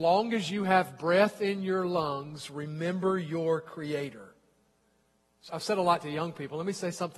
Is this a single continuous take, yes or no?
no